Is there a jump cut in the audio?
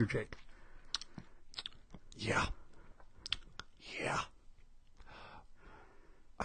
no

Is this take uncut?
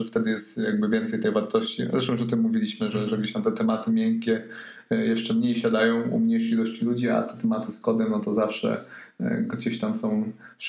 yes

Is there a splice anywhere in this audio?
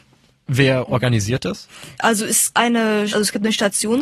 yes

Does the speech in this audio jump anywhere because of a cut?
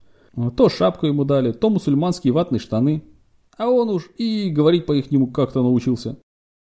no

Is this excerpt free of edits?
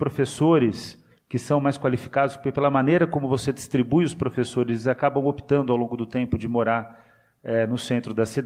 yes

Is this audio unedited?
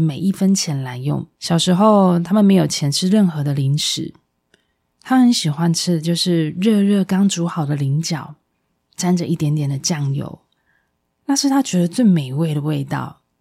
no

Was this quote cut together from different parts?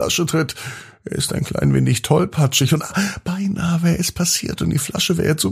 no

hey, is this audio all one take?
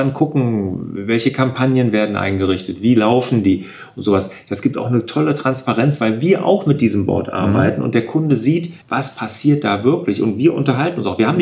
no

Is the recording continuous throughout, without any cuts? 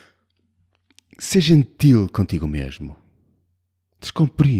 yes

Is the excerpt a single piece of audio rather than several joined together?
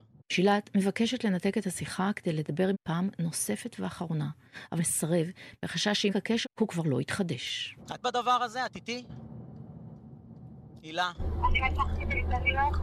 no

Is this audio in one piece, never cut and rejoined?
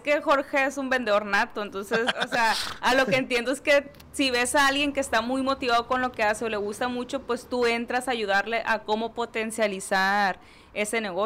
yes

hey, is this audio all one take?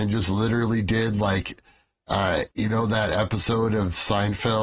no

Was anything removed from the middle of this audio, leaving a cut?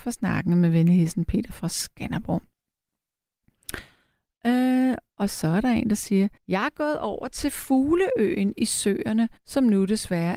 yes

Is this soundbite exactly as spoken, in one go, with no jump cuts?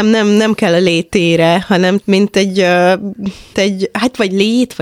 no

